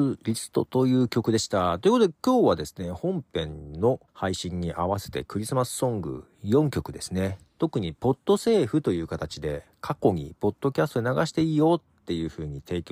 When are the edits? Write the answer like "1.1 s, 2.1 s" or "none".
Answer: 4.1 s